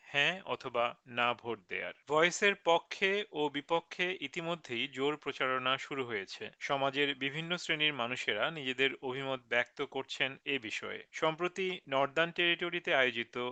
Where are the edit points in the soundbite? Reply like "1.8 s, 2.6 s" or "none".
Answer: 2.0 s, 6.6 s, 11.1 s